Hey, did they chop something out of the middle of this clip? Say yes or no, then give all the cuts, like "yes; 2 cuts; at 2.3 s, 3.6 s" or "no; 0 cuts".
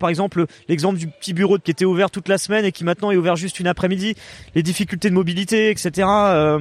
yes; 1 cut; at 1.6 s